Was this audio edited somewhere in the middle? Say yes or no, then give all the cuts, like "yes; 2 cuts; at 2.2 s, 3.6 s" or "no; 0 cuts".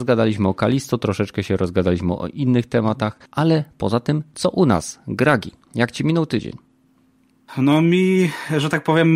yes; 1 cut; at 3.3 s